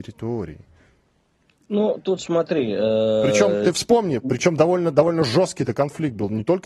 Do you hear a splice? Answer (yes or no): no